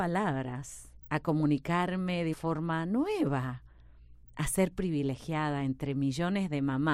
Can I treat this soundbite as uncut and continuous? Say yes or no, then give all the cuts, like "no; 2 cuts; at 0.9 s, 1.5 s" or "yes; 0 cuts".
no; 1 cut; at 2.3 s